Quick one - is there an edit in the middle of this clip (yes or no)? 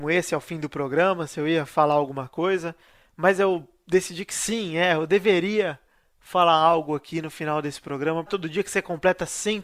yes